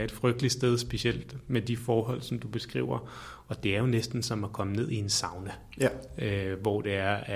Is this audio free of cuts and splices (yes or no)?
yes